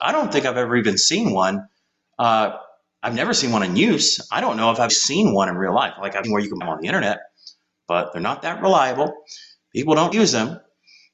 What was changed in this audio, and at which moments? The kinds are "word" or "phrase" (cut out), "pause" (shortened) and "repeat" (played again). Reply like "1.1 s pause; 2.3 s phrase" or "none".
4.9 s word; 6.2 s word; 6.6 s word; 10.1 s word